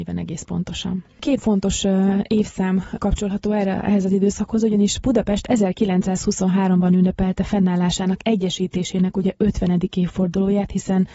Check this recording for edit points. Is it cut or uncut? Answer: cut